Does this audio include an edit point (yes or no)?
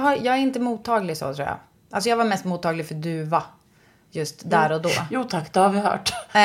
no